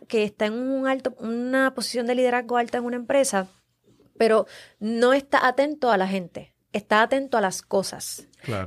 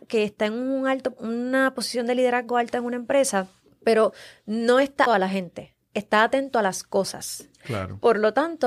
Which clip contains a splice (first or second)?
second